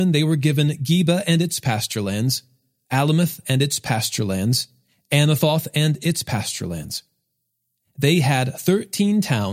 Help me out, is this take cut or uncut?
uncut